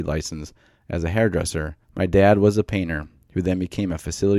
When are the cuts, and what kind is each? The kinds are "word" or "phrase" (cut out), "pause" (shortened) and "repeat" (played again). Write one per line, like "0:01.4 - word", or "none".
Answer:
0:01.8 - pause